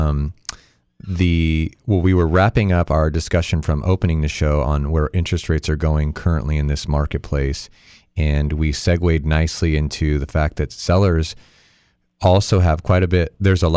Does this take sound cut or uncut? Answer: uncut